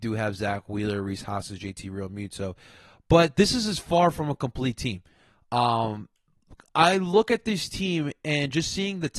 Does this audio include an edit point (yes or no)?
no